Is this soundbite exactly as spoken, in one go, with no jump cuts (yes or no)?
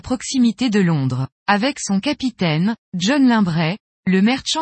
no